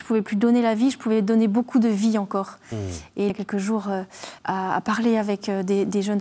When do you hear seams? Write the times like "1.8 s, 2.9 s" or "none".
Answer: 3.3 s, 4.4 s